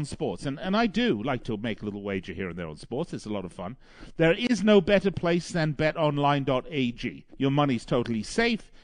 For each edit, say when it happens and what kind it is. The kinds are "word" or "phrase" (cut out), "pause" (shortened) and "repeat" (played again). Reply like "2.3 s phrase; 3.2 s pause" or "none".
7.3 s pause